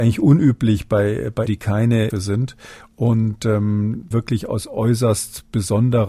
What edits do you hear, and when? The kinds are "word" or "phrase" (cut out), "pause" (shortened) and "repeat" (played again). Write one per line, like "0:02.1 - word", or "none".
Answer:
0:01.5 - word
0:02.1 - word
0:04.1 - phrase